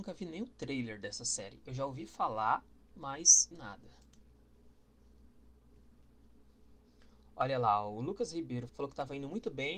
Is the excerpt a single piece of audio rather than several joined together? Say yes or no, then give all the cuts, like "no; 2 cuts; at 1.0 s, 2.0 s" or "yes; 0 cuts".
no; 2 cuts; at 3.5 s, 8.7 s